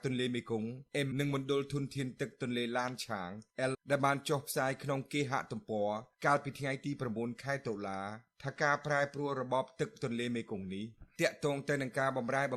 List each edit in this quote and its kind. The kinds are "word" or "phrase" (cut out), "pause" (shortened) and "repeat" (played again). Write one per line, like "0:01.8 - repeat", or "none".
0:01.1 - word
0:03.7 - word